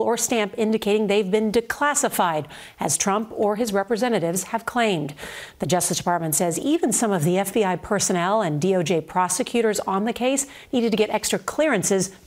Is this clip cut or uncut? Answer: uncut